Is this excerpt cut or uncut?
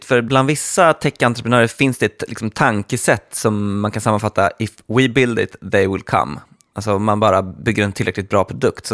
uncut